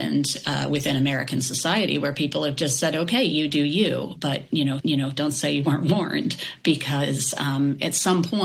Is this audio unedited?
no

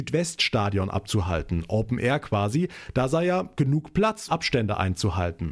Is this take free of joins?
no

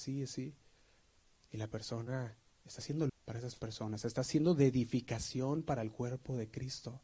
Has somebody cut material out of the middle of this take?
yes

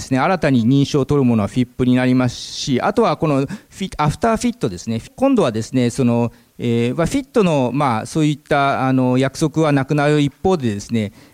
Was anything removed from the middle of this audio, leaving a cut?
no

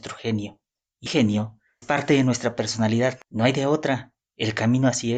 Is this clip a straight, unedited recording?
no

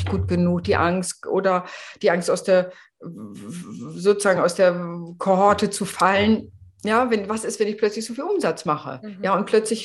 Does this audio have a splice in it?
no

